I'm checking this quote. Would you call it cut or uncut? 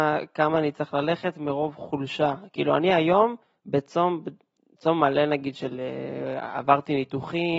cut